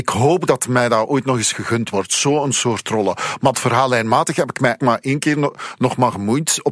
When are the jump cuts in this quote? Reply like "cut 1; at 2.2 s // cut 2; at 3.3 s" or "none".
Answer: cut 1; at 3.5 s // cut 2; at 4.8 s